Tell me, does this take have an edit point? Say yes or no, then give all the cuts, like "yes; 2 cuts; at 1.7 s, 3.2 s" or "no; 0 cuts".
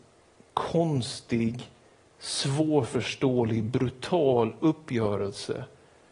no; 0 cuts